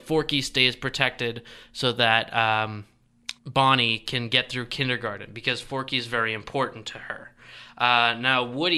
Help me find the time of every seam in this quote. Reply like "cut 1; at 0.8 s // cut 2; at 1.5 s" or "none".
cut 1; at 3.4 s